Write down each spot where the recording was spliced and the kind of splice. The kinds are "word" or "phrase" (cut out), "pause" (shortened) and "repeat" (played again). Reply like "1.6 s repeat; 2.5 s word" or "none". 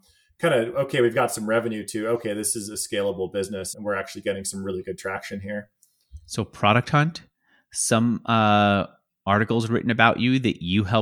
3.7 s word